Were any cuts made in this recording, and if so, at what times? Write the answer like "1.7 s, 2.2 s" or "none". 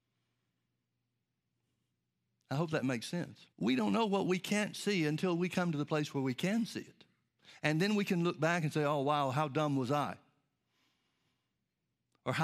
3.5 s